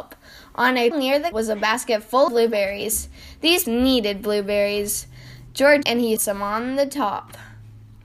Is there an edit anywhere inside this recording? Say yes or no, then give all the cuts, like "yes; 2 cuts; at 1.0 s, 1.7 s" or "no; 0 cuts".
yes; 6 cuts; at 0.9 s, 1.3 s, 2.3 s, 3.6 s, 5.8 s, 6.2 s